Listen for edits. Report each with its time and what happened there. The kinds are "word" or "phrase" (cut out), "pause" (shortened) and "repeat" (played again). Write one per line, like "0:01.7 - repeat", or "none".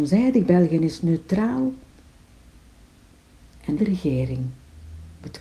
0:03.8 - word